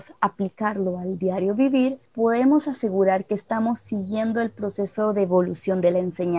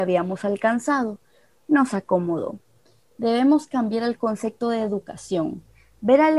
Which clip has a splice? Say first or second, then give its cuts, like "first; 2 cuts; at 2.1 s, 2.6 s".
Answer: first; 1 cut; at 2.1 s